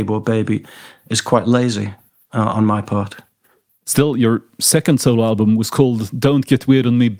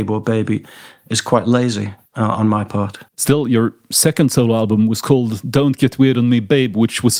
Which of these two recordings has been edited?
second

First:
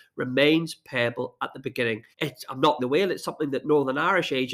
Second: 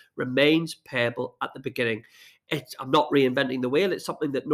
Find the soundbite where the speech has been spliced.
first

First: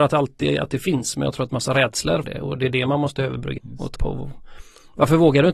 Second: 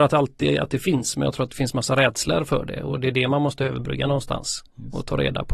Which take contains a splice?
first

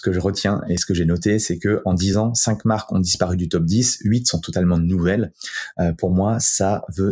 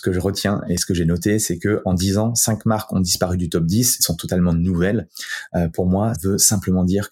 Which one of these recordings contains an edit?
second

